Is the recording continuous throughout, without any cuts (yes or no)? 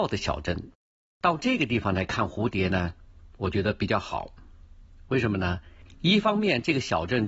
yes